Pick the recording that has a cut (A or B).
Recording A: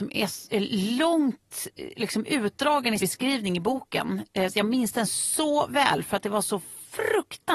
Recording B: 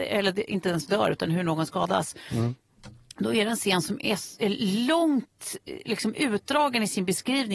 A